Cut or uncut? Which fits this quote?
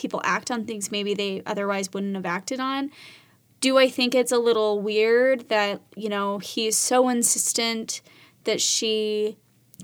uncut